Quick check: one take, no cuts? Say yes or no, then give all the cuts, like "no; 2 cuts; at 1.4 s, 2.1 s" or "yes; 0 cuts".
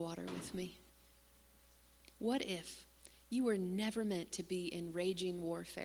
yes; 0 cuts